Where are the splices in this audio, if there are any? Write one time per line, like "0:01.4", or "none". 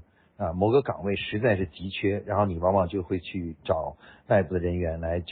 none